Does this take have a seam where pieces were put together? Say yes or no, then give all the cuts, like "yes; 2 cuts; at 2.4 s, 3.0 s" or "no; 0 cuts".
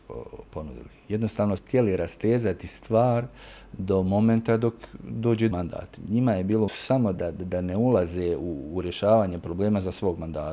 yes; 4 cuts; at 1.6 s, 5.5 s, 6.7 s, 7.1 s